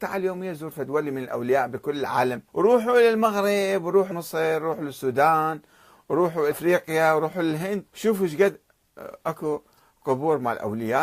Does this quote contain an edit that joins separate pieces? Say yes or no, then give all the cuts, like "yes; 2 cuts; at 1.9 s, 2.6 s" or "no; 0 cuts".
yes; 4 cuts; at 2.5 s, 4.1 s, 6.5 s, 7.9 s